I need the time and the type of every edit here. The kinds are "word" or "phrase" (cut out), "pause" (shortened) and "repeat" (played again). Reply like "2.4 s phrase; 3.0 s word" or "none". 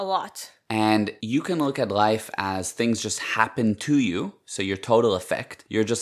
none